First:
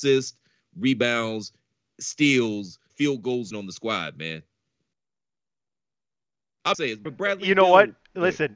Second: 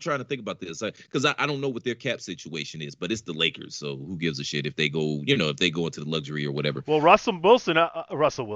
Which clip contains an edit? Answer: first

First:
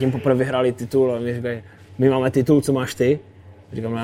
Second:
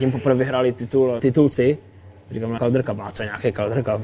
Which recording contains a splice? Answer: second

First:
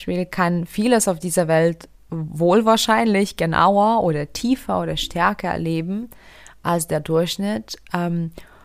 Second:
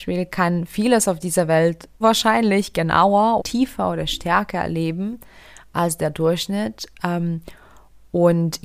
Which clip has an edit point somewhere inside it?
second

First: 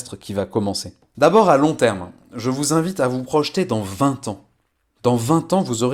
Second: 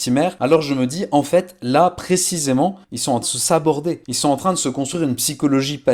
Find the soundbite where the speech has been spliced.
second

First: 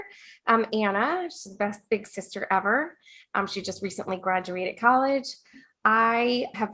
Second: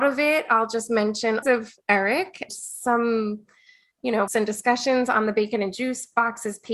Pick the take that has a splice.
second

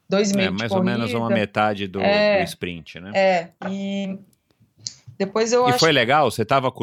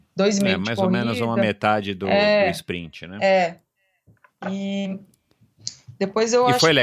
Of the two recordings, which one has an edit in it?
first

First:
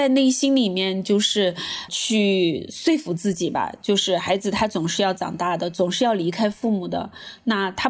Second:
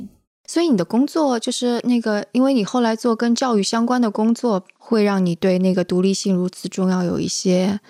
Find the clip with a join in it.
first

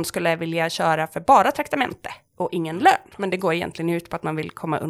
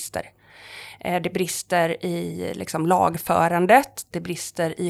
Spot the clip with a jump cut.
first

